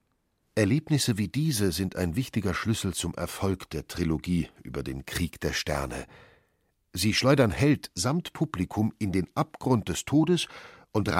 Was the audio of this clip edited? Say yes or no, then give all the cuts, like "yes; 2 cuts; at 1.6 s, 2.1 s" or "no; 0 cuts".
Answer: no; 0 cuts